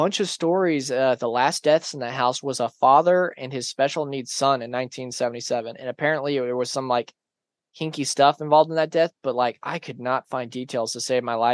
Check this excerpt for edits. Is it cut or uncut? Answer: uncut